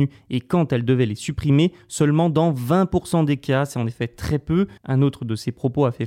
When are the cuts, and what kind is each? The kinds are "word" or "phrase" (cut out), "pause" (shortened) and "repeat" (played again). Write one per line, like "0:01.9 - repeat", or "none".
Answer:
0:04.8 - pause

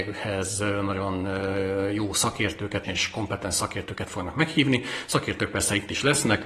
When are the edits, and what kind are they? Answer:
0:02.8 - word

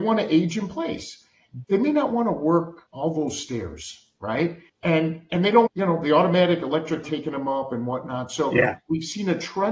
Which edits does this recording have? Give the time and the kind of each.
0:01.6 - word
0:02.9 - pause
0:04.7 - pause
0:05.7 - word
0:07.0 - word

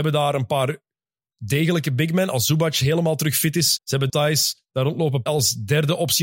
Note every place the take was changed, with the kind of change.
0:03.8 - word
0:04.1 - word
0:05.3 - word

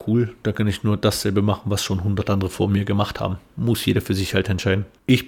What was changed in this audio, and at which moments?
none

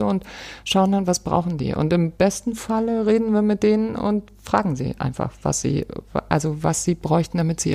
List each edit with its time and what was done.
none

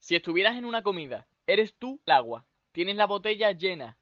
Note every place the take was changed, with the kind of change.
0:01.3 - pause
0:02.1 - phrase

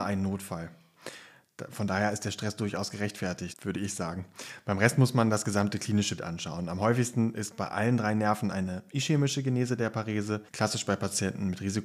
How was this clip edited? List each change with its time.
0:03.5 - word
0:06.2 - word
0:10.5 - pause

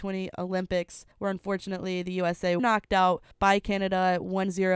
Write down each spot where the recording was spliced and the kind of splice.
0:01.1 - pause
0:02.6 - word
0:03.3 - pause

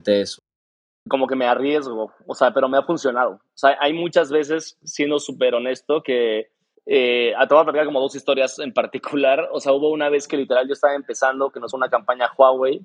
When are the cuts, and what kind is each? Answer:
0:06.7 - pause
0:11.7 - word

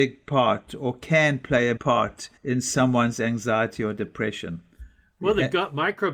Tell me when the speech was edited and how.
0:01.8 - word
0:02.4 - pause

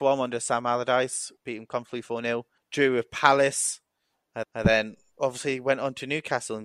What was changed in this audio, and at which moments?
0:01.4 - word
0:02.6 - pause
0:04.4 - repeat

